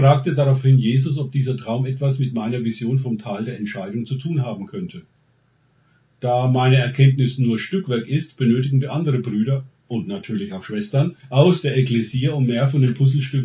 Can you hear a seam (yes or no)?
yes